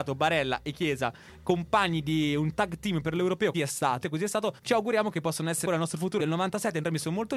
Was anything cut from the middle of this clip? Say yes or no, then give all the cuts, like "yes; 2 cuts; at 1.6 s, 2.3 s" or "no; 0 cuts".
yes; 5 cuts; at 3.5 s, 4.0 s, 4.6 s, 5.7 s, 6.2 s